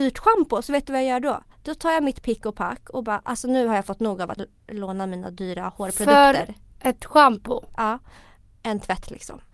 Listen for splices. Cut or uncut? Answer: cut